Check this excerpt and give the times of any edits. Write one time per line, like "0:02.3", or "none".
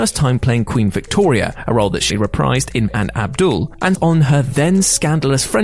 0:02.1
0:02.9
0:03.9